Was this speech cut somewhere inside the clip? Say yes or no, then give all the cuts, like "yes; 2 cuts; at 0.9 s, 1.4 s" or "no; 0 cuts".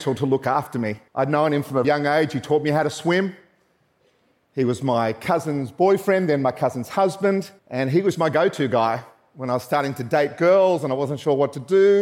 yes; 4 cuts; at 1.1 s, 1.8 s, 7.6 s, 8.1 s